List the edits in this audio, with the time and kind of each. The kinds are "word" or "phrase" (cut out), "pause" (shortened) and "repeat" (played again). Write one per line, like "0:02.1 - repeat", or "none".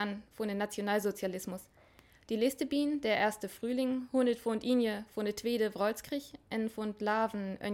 none